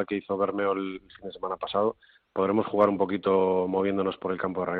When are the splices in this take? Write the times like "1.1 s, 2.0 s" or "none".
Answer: none

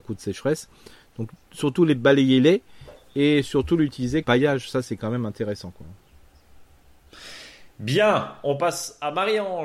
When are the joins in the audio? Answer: 4.2 s

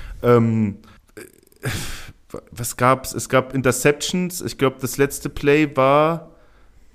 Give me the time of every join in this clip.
1.0 s

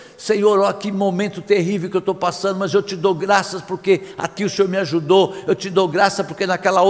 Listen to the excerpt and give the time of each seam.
4.4 s

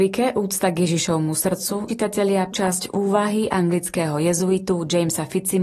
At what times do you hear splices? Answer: 1.9 s, 2.5 s

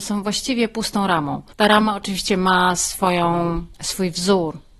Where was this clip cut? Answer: 1.5 s, 3.7 s

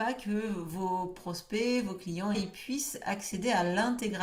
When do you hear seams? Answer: 2.3 s

